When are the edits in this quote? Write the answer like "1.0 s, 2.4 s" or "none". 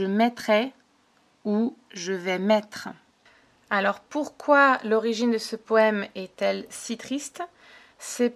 none